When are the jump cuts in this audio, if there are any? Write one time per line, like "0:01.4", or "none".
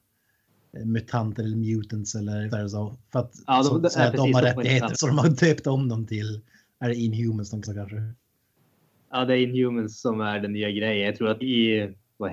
0:02.5
0:04.9
0:07.6
0:11.4